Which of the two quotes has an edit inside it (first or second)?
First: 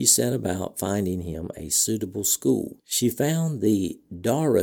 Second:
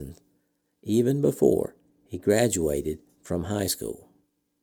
first